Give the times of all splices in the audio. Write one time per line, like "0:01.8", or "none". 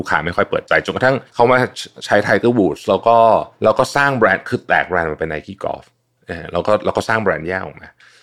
0:01.3
0:03.5

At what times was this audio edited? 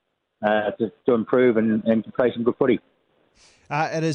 none

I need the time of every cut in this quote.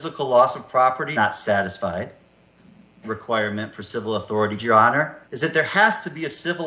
0:01.1
0:03.0
0:04.6
0:05.2

